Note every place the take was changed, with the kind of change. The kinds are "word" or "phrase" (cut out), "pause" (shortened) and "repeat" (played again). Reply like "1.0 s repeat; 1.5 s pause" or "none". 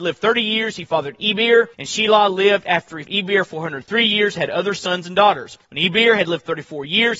1.7 s pause; 3.0 s word; 5.6 s pause